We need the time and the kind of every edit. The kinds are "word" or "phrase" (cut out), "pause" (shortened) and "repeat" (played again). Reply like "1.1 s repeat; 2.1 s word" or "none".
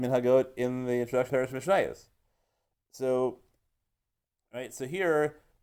1.3 s word